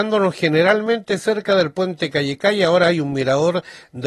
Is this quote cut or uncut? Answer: uncut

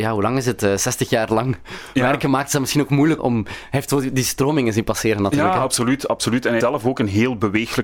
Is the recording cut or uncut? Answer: cut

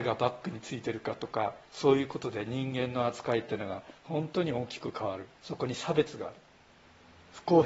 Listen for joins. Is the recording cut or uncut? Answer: cut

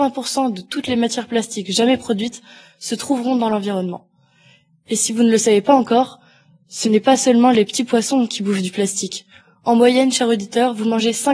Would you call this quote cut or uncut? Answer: uncut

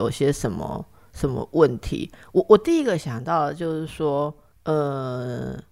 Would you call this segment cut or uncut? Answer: uncut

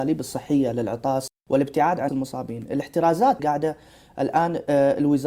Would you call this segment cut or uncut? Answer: cut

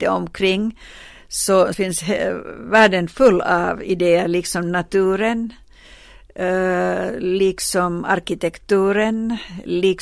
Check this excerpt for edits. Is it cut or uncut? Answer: cut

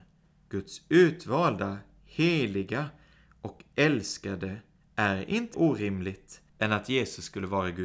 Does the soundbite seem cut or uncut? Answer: cut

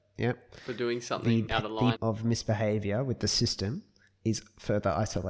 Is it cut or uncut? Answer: cut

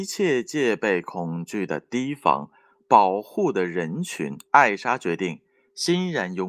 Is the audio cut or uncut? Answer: cut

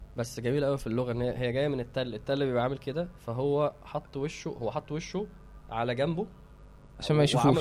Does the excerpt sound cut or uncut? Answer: cut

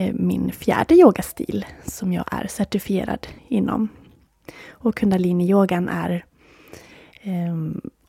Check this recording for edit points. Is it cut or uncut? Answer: cut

